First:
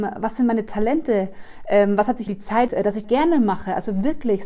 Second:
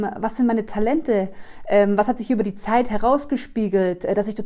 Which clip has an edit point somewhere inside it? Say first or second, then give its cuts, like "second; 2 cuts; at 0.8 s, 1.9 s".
first; 3 cuts; at 2.3 s, 2.7 s, 3.0 s